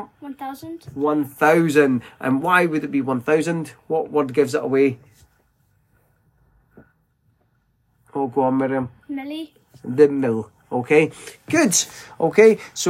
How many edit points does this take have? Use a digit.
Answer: 0